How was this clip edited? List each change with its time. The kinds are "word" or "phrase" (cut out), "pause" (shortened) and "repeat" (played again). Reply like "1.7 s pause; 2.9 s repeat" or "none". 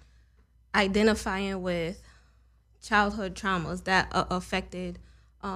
none